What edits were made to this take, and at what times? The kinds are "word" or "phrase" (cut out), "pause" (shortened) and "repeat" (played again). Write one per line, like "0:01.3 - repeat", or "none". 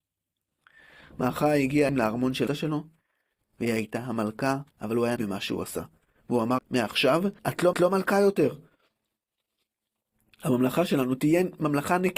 0:01.9 - phrase
0:02.5 - phrase
0:04.7 - pause
0:05.2 - phrase
0:06.6 - word
0:07.4 - pause
0:07.7 - repeat